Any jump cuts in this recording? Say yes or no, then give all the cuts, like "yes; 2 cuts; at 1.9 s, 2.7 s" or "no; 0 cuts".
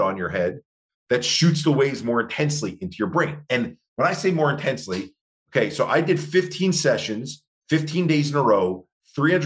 no; 0 cuts